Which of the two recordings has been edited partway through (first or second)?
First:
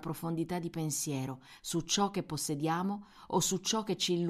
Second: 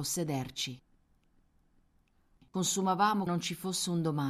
second